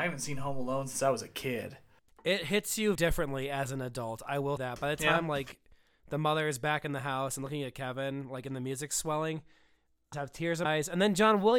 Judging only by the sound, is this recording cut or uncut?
cut